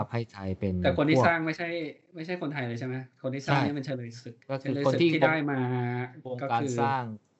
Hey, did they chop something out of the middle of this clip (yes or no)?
yes